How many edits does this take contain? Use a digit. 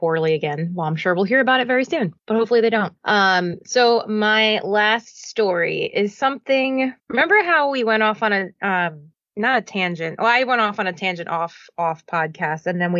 3